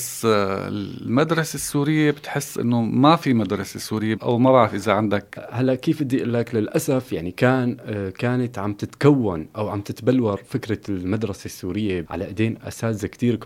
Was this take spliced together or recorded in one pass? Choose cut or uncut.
cut